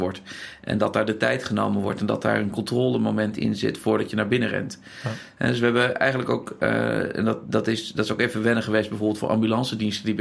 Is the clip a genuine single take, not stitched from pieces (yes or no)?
yes